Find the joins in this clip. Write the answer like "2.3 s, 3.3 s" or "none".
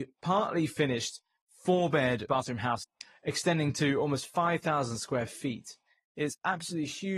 2.3 s

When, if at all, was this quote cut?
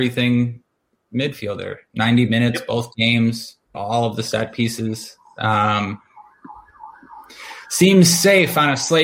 3.7 s

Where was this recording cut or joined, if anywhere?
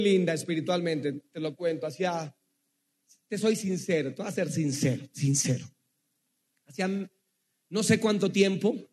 none

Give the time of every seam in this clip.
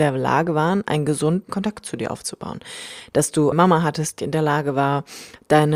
1.5 s, 3.5 s, 4.2 s

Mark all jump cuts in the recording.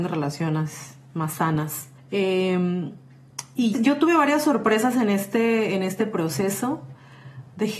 2.0 s, 3.7 s

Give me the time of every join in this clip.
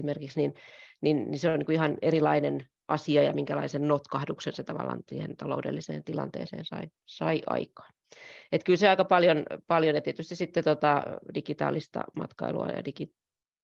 none

